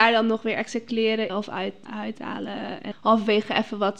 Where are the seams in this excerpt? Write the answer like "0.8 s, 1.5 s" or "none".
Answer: 1.3 s, 1.9 s, 2.9 s